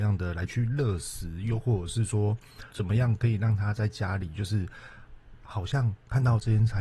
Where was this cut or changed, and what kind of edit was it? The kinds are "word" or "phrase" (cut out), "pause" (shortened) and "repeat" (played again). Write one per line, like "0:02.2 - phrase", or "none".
0:02.7 - word